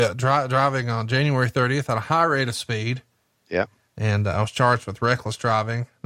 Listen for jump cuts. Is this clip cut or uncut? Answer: uncut